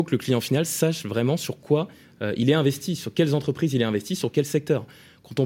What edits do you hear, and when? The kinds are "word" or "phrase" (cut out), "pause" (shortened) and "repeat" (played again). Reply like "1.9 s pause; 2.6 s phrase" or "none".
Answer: none